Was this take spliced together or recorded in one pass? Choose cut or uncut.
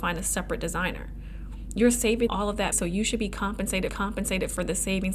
cut